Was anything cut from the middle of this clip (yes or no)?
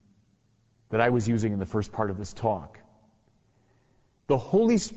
no